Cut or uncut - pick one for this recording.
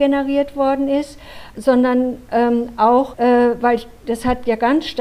cut